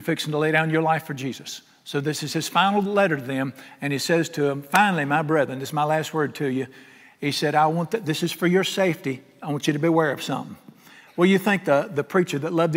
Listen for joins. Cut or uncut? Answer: uncut